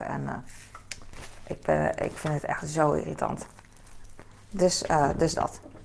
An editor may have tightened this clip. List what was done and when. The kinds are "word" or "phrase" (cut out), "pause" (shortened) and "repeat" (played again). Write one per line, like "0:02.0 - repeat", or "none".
none